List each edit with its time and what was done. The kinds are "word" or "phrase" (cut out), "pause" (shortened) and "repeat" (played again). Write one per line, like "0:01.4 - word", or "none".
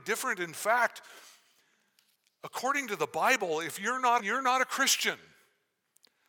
0:04.2 - phrase

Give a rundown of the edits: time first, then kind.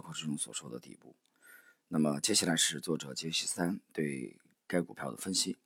none

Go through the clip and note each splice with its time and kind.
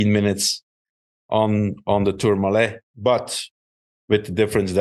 none

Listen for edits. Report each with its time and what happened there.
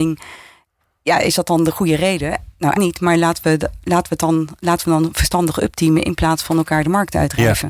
0:02.7 - word

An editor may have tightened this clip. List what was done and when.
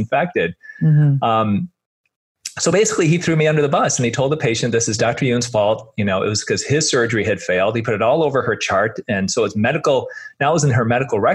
none

